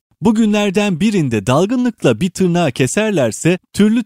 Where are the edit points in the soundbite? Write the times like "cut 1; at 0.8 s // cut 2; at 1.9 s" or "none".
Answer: none